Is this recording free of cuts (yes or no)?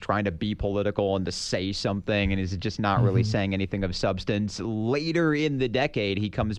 yes